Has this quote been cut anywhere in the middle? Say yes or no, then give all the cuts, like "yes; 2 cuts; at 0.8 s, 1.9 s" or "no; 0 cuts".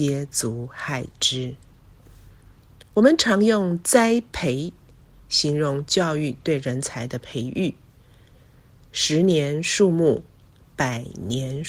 no; 0 cuts